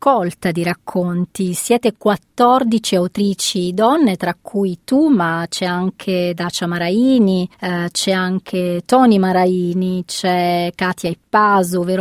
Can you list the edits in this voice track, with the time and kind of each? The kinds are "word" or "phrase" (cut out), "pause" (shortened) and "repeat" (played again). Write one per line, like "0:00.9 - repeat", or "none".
0:07.5 - pause